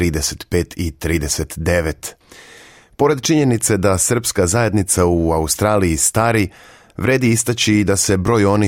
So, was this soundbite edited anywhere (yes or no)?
no